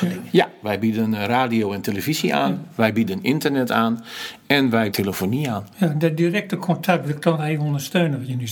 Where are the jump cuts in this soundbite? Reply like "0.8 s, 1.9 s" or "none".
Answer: 4.9 s